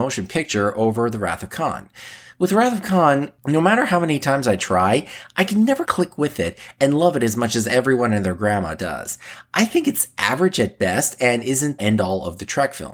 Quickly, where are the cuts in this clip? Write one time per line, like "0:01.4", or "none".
0:05.9
0:11.8